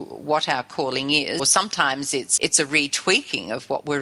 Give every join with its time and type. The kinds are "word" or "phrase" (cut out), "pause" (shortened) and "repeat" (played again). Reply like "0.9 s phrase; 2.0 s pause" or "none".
1.4 s word; 2.4 s word

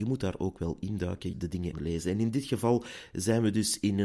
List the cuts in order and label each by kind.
1.3 s word; 1.7 s word

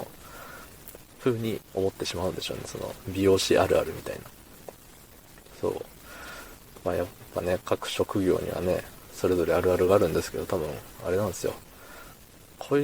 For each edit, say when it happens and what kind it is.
1.7 s pause

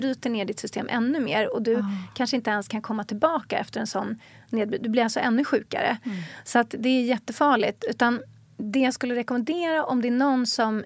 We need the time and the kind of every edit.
none

